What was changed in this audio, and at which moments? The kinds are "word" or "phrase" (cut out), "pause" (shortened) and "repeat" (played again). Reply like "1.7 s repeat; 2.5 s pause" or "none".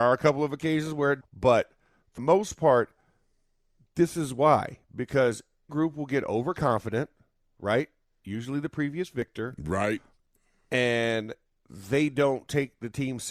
1.2 s word; 2.2 s word; 5.7 s word